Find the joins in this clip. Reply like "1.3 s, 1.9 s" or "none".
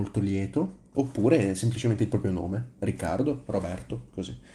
0.9 s